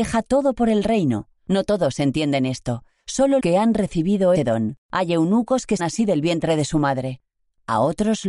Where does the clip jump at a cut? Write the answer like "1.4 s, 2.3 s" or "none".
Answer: 1.4 s, 3.4 s, 4.3 s, 4.8 s, 5.8 s